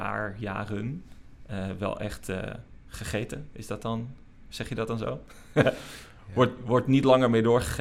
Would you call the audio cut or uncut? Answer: uncut